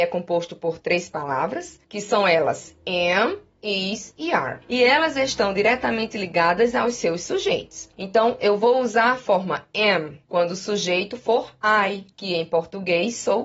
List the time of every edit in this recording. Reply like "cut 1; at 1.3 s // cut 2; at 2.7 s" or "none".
cut 1; at 1.8 s // cut 2; at 4.6 s // cut 3; at 7.9 s // cut 4; at 10.2 s // cut 5; at 12.1 s